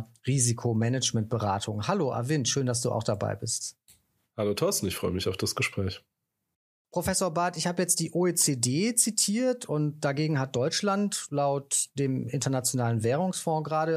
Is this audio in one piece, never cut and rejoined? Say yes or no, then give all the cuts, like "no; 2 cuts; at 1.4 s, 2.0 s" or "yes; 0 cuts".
yes; 0 cuts